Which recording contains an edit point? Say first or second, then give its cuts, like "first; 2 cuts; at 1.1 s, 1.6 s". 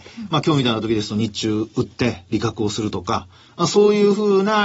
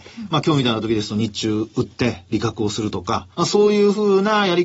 second; 1 cut; at 3.3 s